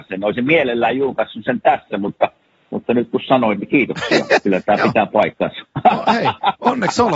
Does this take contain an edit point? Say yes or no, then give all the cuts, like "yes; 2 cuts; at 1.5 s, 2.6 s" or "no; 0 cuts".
no; 0 cuts